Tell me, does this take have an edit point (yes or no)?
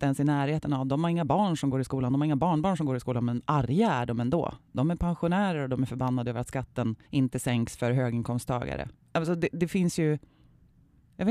yes